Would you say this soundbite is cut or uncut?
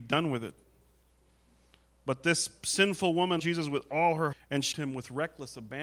cut